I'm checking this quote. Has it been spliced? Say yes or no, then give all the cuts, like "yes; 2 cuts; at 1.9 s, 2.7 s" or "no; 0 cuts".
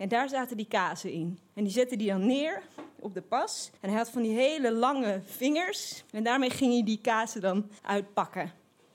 yes; 4 cuts; at 1.5 s, 3.8 s, 6.1 s, 7.8 s